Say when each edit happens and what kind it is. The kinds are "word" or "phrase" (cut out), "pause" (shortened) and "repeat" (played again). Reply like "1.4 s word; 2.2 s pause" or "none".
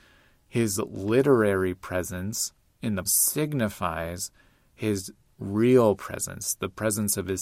3.0 s word

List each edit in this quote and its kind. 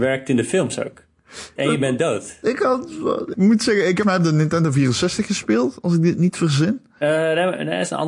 1.6 s phrase; 3.3 s word; 4.0 s word

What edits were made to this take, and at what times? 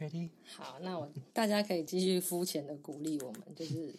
1.3 s pause

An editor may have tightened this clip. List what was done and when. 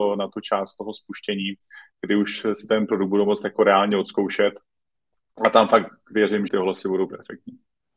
6.5 s phrase

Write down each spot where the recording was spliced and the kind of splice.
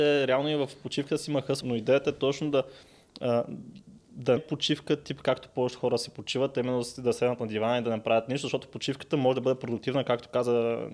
1.6 s word; 4.4 s word

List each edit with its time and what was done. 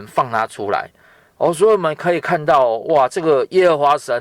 none

